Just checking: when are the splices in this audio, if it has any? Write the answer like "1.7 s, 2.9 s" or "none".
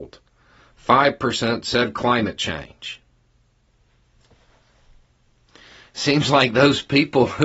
none